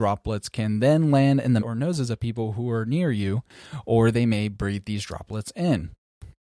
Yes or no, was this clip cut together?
yes